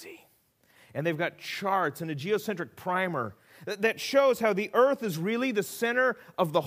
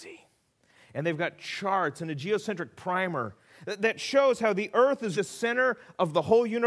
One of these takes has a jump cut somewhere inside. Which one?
second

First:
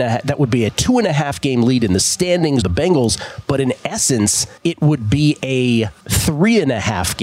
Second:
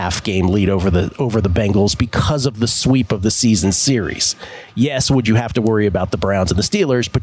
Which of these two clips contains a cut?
first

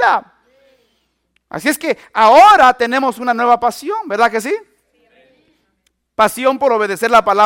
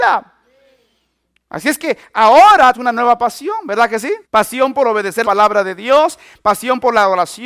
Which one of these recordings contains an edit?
second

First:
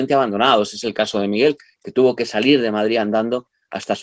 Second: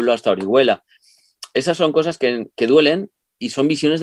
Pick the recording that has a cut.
second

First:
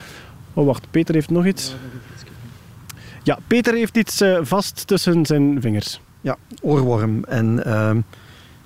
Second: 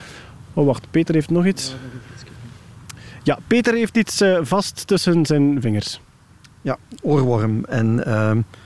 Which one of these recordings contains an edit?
first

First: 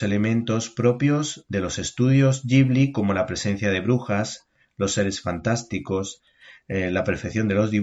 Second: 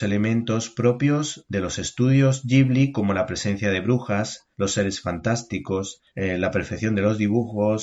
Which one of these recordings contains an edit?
second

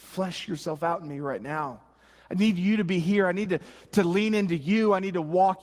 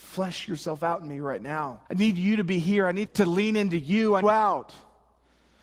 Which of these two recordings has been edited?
second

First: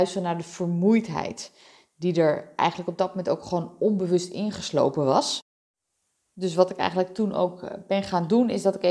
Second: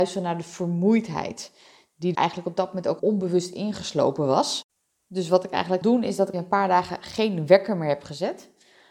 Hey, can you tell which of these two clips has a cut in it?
second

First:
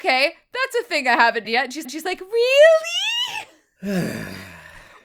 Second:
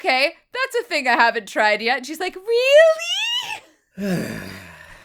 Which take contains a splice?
first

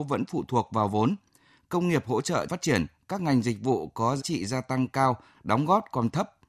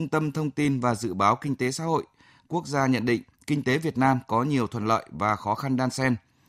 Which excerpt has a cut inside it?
first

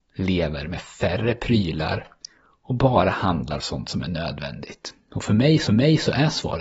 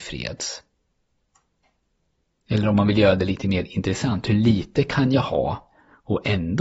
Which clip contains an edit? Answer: first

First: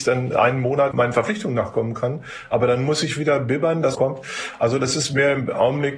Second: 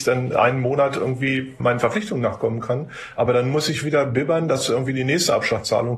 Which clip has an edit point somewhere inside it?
first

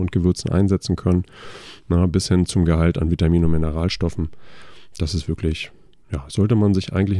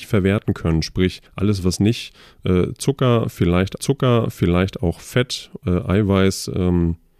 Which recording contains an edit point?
second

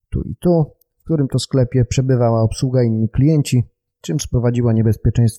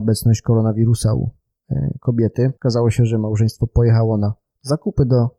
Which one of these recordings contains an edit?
second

